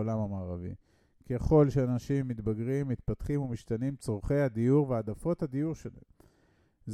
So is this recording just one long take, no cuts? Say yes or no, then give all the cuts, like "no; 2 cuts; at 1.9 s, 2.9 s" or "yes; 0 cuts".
yes; 0 cuts